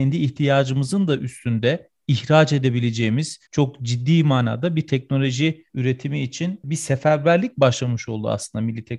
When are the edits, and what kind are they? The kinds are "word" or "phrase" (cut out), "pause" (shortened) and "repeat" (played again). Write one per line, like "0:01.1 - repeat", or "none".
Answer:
0:03.5 - pause
0:05.7 - pause

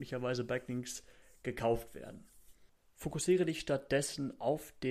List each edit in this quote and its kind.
none

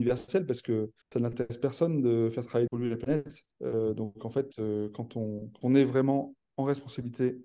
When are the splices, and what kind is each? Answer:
0:01.0 - pause
0:02.7 - phrase
0:03.5 - pause
0:05.6 - word

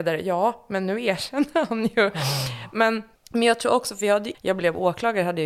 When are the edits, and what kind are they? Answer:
0:03.1 - pause
0:04.3 - word

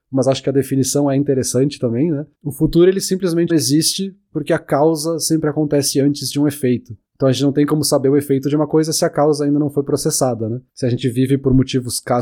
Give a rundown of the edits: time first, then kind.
0:02.3 - pause
0:03.5 - word
0:07.1 - pause
0:10.7 - pause

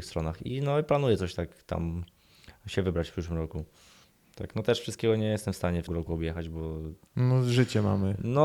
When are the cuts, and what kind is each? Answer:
0:05.9 - word

